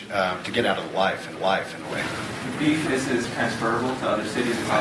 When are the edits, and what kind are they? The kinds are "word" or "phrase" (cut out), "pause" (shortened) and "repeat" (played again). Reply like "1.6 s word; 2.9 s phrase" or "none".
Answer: 1.4 s repeat; 2.9 s word; 3.2 s word